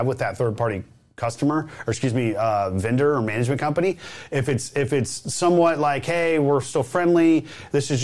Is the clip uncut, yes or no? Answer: yes